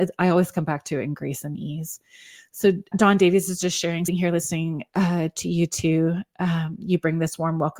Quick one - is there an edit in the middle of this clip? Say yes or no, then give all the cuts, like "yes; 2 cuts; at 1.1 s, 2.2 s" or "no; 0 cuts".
yes; 2 cuts; at 2.9 s, 4.1 s